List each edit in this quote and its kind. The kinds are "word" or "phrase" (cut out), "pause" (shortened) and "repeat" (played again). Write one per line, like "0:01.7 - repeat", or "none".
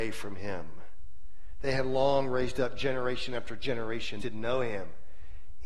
0:04.2 - phrase